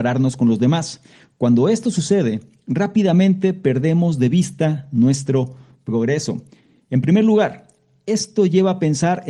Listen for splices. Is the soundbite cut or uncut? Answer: uncut